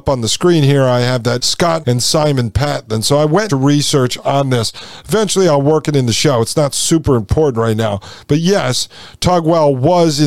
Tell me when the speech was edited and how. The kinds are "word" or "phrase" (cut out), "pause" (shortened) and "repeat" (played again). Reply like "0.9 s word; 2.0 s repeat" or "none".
1.4 s phrase; 1.8 s word; 3.5 s phrase